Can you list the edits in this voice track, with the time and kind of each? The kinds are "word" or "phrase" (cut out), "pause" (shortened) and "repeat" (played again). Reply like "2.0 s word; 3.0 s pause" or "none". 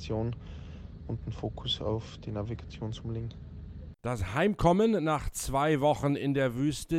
none